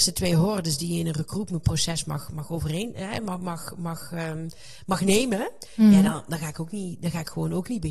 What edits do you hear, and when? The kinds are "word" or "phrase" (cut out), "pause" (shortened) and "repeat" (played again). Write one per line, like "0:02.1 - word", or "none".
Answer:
none